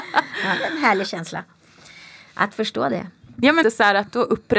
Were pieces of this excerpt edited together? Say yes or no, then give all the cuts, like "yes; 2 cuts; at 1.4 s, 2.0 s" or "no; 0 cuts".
yes; 1 cut; at 3.6 s